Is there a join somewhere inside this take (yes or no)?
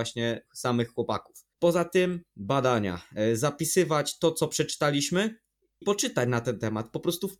yes